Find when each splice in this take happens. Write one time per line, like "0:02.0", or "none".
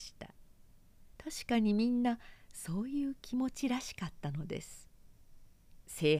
0:01.1